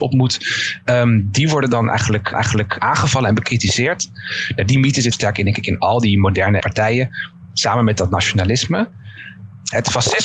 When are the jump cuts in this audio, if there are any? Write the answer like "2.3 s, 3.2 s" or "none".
2.3 s, 5.1 s, 6.6 s